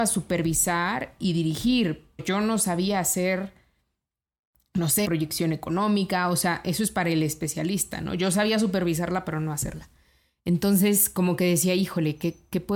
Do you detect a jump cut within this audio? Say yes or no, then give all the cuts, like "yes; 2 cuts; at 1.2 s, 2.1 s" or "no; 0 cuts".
yes; 2 cuts; at 2.2 s, 5.0 s